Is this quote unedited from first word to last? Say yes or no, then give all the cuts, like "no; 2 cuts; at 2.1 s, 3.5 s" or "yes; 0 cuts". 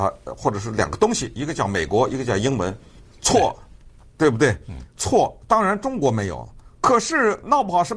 no; 2 cuts; at 3.0 s, 6.7 s